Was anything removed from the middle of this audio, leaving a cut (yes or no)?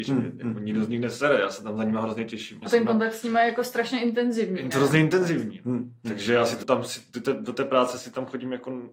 yes